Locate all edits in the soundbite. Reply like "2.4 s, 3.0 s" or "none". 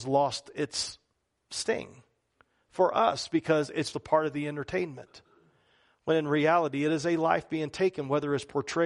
3.9 s

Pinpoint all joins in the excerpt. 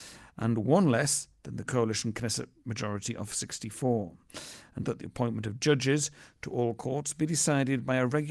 1.7 s, 4.8 s

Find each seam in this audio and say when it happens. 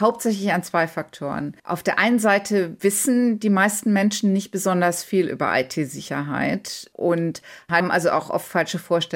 1.6 s

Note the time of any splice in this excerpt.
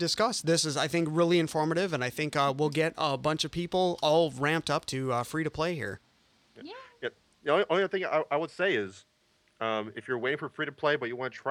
none

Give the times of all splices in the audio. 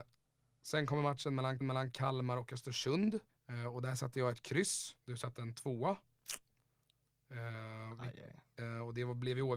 1.6 s, 3.3 s, 5.0 s

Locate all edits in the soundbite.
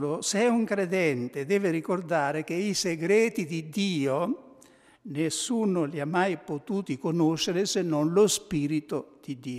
none

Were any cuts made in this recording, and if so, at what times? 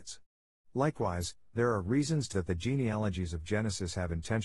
2.3 s

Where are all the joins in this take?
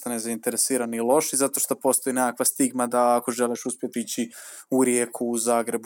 3.9 s

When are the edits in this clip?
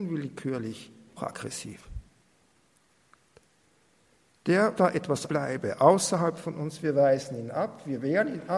1.2 s, 4.8 s, 5.3 s

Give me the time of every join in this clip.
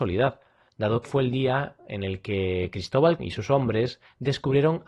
1.0 s, 3.2 s

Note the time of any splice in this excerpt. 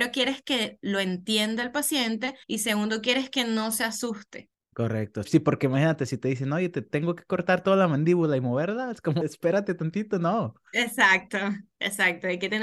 2.4 s, 5.2 s, 9.2 s, 10.7 s

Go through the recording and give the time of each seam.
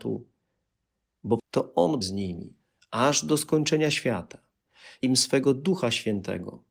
1.4 s, 2.0 s, 5.0 s

